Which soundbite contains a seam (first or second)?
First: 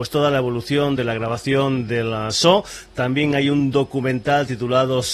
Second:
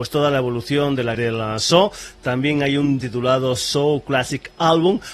second